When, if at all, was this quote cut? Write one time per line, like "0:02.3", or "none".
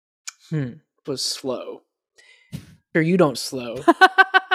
0:01.0
0:02.9
0:03.3